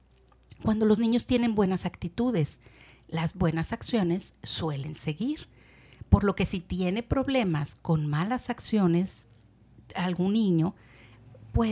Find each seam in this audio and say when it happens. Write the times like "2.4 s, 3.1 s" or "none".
none